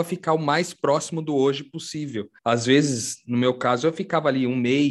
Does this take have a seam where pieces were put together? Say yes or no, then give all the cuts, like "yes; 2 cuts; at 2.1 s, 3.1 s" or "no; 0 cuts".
yes; 1 cut; at 2.4 s